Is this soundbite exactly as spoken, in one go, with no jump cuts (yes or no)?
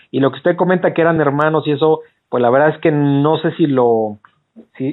yes